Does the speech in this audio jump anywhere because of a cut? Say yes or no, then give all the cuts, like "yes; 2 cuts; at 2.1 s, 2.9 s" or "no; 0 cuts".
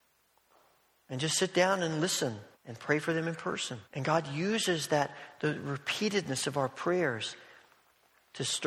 yes; 2 cuts; at 2.5 s, 3.8 s